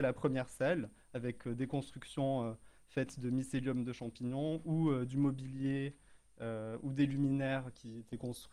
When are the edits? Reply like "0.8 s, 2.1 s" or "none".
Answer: none